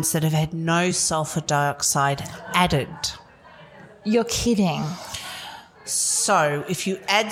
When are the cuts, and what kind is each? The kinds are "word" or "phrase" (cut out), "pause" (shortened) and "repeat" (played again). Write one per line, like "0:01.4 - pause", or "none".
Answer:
none